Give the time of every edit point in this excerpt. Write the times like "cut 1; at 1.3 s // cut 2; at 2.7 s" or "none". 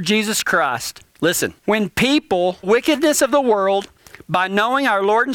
cut 1; at 1.6 s // cut 2; at 2.6 s